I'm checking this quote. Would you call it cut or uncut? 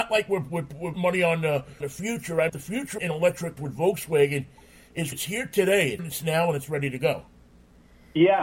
cut